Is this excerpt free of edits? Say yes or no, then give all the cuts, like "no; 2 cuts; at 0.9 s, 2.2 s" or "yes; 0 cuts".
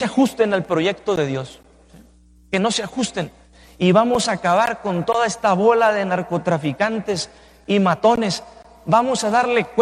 yes; 0 cuts